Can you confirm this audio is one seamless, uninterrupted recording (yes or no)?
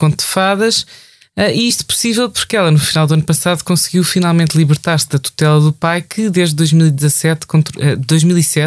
yes